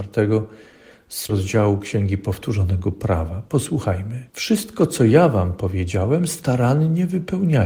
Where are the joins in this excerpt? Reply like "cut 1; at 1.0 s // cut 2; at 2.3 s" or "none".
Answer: cut 1; at 1.3 s // cut 2; at 4.3 s